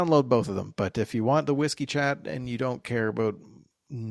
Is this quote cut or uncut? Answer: uncut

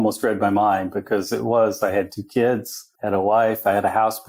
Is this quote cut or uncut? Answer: cut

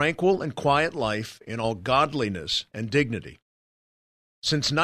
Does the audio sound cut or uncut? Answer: uncut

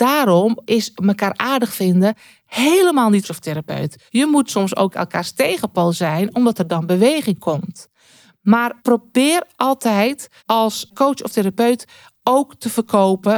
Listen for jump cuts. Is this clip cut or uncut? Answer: cut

